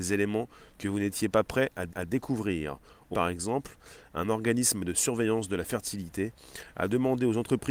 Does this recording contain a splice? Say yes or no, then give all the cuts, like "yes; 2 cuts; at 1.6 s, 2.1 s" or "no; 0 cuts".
yes; 2 cuts; at 1.9 s, 3.1 s